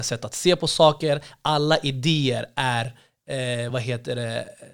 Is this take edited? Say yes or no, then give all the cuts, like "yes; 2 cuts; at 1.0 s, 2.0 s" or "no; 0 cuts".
no; 0 cuts